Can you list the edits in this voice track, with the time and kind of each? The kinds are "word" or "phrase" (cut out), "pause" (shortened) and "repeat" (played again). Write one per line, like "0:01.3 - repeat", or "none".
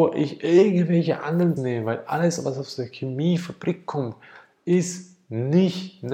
0:01.6 - word